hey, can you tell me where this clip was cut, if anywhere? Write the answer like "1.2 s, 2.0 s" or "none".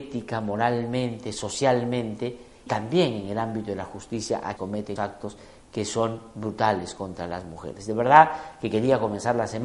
2.7 s, 4.6 s, 5.0 s